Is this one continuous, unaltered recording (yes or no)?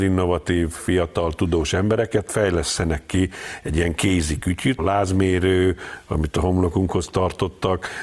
no